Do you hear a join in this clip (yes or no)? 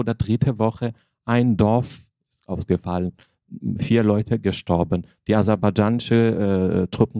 no